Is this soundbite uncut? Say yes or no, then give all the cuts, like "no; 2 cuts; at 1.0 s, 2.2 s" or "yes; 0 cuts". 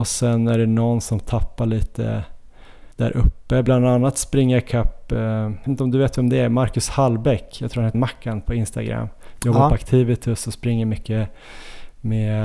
no; 3 cuts; at 2.9 s, 5.7 s, 7.9 s